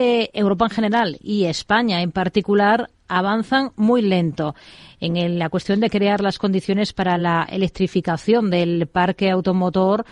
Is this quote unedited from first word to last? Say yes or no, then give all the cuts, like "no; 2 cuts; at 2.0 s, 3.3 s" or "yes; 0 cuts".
yes; 0 cuts